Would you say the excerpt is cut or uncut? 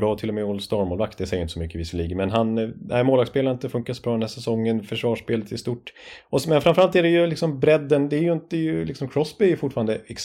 uncut